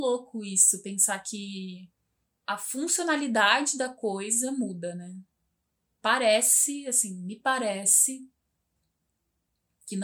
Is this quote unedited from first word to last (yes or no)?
yes